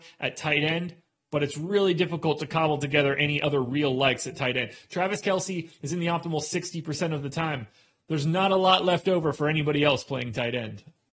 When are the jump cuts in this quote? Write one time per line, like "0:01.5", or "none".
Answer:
none